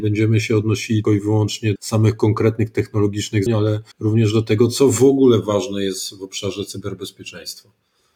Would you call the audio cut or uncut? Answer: cut